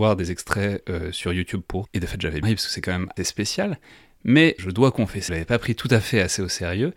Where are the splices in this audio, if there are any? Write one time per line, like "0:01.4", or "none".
0:01.8
0:02.4
0:03.2
0:04.6
0:05.3